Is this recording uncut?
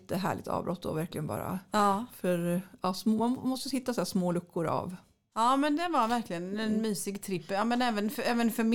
yes; 0 cuts

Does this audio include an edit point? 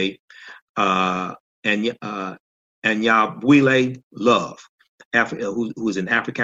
no; 0 cuts

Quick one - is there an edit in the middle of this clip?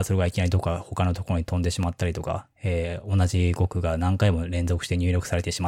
yes; 1 cut; at 2.5 s

